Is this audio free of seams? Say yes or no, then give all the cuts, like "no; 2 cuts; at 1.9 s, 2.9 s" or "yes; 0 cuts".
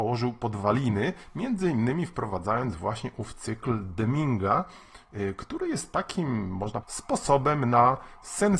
no; 1 cut; at 6.8 s